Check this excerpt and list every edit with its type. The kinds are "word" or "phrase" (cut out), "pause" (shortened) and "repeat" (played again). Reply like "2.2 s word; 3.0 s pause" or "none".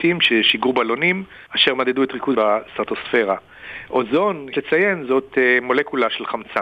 1.5 s pause; 2.3 s word; 4.5 s word